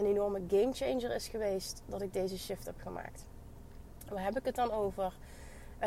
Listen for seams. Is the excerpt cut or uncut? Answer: uncut